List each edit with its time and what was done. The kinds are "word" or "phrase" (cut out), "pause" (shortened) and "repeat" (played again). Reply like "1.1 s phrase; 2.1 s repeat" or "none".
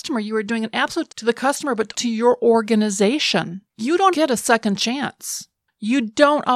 1.1 s word; 1.9 s word; 3.7 s pause; 4.1 s word